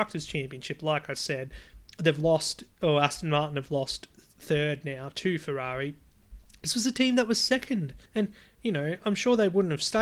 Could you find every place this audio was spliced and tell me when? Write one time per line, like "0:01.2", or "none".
0:08.1

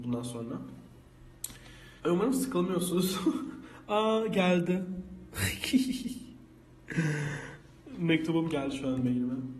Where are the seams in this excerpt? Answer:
0:02.0

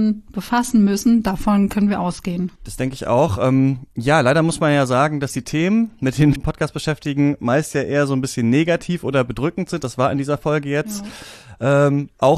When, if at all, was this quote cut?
0:06.4

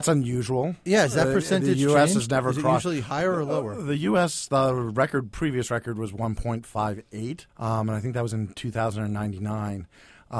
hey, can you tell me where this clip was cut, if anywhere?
0:07.5

